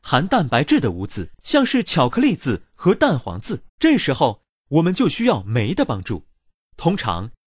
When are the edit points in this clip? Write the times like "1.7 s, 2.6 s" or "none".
1.3 s, 3.7 s